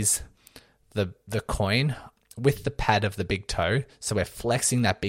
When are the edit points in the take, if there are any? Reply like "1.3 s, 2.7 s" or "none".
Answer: 2.2 s